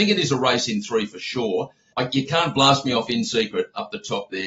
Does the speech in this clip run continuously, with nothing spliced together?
yes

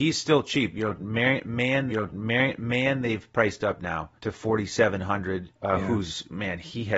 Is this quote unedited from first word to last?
no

